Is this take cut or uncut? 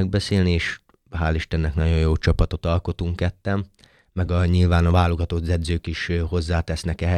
uncut